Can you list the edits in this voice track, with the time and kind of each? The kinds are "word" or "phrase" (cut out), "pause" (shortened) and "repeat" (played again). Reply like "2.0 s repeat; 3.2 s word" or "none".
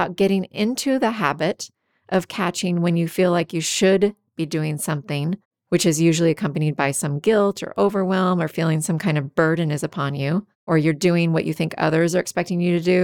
10.5 s pause